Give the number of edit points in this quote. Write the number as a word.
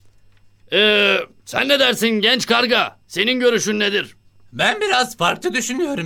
zero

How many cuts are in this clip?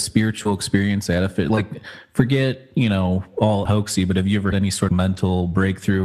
three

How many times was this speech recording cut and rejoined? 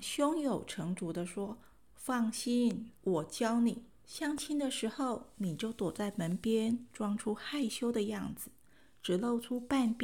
two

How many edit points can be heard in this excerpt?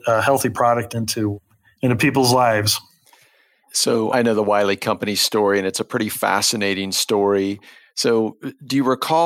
one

